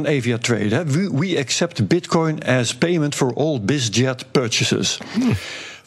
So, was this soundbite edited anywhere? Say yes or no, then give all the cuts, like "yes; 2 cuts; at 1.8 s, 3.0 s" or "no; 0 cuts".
no; 0 cuts